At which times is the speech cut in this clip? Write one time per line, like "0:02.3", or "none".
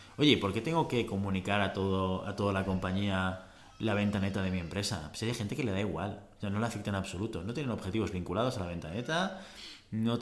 none